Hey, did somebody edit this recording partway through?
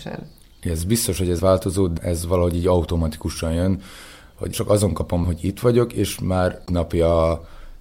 yes; 5 cuts; at 1.4 s, 2.0 s, 4.5 s, 5.2 s, 6.7 s

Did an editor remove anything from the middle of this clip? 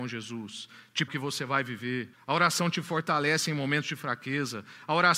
yes; 2 cuts; at 1.1 s, 2.1 s

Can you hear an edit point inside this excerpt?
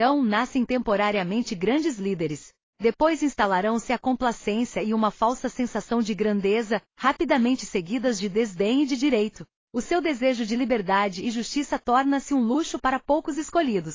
no; 0 cuts

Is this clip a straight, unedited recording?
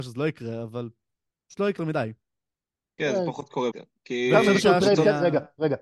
no; 2 cuts; at 1.8 s, 3.7 s

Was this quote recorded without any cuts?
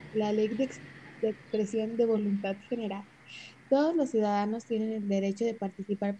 yes; 0 cuts

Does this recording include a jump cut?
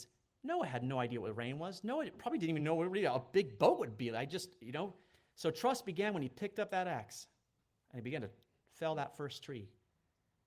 no; 0 cuts

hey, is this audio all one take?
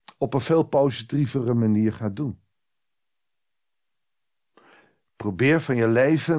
yes; 0 cuts

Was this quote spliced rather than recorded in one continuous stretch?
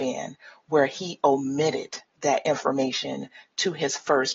no; 0 cuts

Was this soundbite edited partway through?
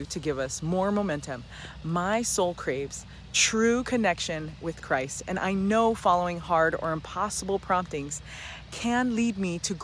no; 0 cuts

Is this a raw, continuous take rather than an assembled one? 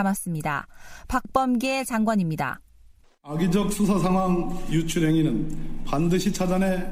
yes; 0 cuts

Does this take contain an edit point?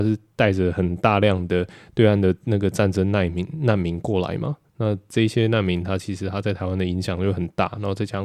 no; 0 cuts

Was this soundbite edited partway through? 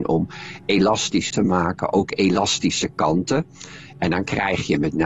yes; 1 cut; at 1.3 s

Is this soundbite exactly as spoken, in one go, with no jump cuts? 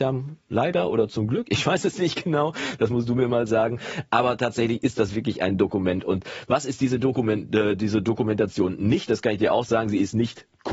yes; 0 cuts

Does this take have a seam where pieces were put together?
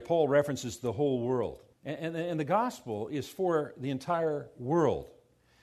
yes; 1 cut; at 1.7 s

